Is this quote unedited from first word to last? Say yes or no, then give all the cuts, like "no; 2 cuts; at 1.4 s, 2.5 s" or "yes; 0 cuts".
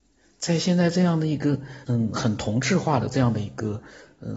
no; 1 cut; at 1.8 s